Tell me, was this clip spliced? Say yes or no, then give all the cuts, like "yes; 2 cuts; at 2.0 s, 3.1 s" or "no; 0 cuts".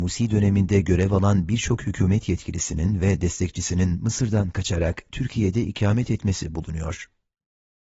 no; 0 cuts